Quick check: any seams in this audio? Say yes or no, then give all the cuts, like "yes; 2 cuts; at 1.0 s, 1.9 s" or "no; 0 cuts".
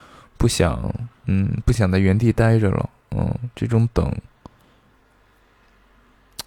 yes; 1 cut; at 1.2 s